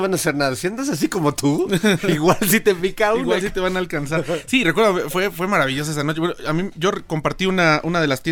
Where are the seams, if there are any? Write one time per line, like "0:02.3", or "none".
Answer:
none